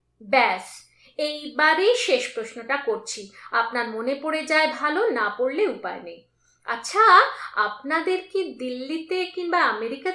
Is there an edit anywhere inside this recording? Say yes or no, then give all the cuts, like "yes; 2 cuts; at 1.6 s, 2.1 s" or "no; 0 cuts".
no; 0 cuts